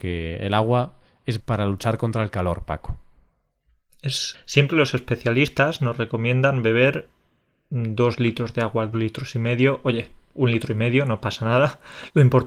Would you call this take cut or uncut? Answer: cut